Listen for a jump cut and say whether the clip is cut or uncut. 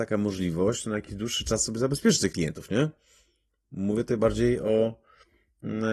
uncut